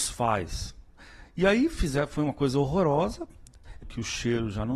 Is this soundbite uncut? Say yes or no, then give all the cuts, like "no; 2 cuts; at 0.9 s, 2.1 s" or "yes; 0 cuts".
no; 1 cut; at 3.8 s